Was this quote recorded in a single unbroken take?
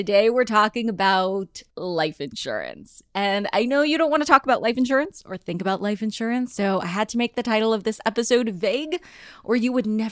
no; 1 cut; at 1.7 s

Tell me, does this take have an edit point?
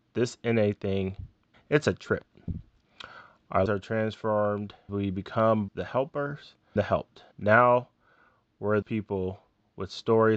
yes; 7 cuts; at 1.5 s, 3.7 s, 4.9 s, 5.7 s, 6.8 s, 7.3 s, 8.8 s

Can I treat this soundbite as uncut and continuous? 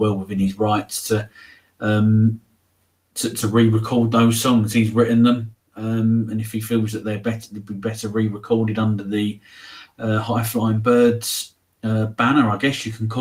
yes; 0 cuts

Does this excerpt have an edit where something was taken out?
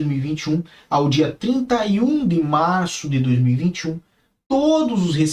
no; 0 cuts

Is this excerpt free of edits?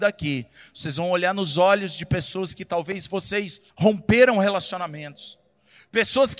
no; 1 cut; at 3.7 s

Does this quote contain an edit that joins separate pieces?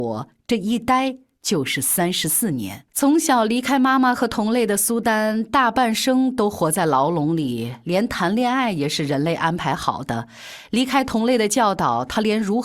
yes; 1 cut; at 2.9 s

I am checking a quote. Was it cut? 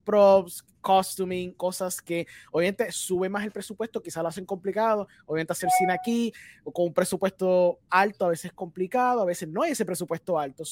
no; 0 cuts

